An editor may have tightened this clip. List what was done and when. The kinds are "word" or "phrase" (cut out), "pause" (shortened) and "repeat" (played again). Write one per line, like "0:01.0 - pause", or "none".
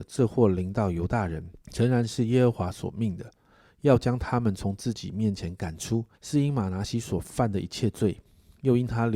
0:01.6 - pause
0:06.1 - pause